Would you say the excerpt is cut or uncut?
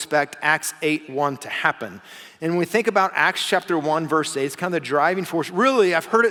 uncut